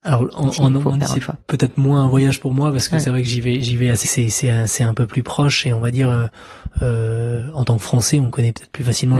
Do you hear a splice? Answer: yes; 2 cuts; at 1.4 s, 4.0 s

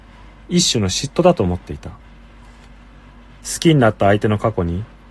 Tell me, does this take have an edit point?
no; 0 cuts

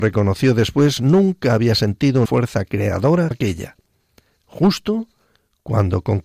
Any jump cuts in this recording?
yes; 2 cuts; at 2.2 s, 3.3 s

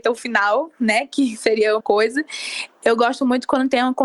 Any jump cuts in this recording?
yes; 1 cut; at 1.8 s

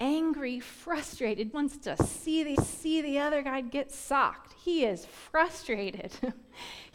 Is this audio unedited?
no; 2 cuts; at 1.5 s, 2.5 s

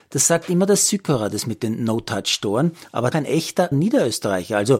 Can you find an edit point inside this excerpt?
yes; 2 cuts; at 3.1 s, 3.7 s

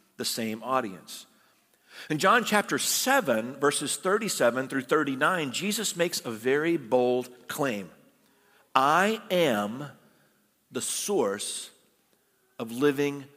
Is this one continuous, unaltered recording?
yes; 0 cuts

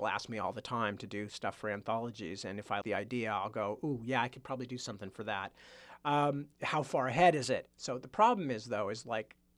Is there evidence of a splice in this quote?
yes; 1 cut; at 2.8 s

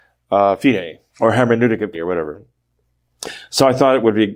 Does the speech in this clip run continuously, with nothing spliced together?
no; 2 cuts; at 1.1 s, 1.9 s

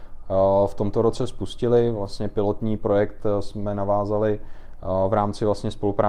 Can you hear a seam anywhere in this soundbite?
no; 0 cuts

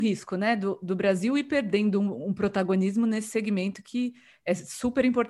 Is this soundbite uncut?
yes; 0 cuts

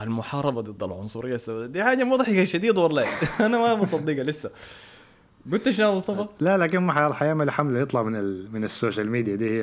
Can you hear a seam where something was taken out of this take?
no; 0 cuts

